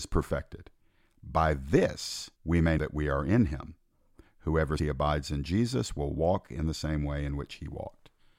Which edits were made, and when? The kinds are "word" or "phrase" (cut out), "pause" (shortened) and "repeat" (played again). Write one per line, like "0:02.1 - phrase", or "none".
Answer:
0:02.3 - pause
0:02.8 - word
0:04.8 - word